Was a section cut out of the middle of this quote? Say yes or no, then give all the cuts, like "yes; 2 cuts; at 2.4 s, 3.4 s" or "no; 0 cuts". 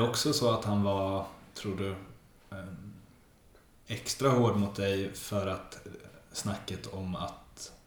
no; 0 cuts